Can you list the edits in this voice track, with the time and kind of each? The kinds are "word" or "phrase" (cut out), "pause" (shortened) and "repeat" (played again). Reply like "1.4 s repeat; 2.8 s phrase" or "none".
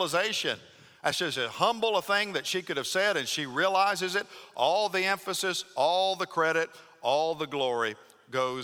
none

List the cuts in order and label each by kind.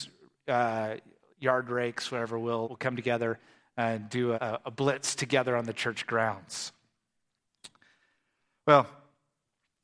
2.6 s word; 4.3 s word

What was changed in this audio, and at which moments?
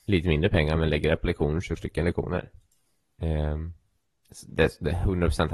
1.8 s phrase

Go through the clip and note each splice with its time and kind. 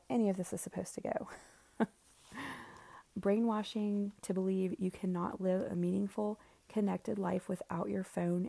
3.1 s word

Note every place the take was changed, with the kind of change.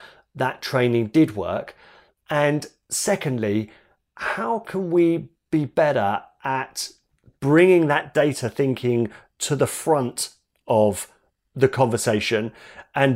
none

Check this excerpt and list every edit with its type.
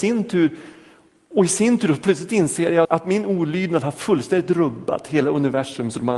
2.8 s word

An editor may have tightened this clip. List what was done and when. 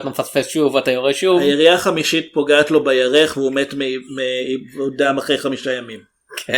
none

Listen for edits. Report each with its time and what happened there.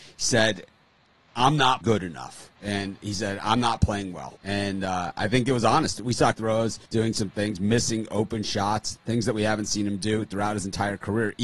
1.8 s word; 2.6 s pause; 4.4 s pause; 6.3 s phrase; 6.9 s pause

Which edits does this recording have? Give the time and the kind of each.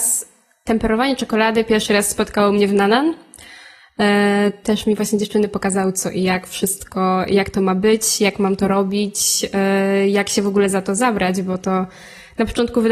none

